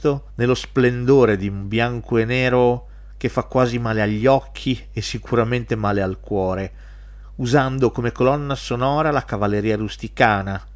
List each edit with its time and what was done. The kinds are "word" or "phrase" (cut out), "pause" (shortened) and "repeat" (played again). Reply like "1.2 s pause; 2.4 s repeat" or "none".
none